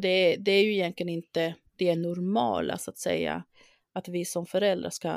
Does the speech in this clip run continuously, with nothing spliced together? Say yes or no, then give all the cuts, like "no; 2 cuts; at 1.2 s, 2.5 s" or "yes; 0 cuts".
yes; 0 cuts